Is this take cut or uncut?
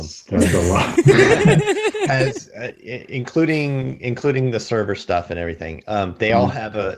uncut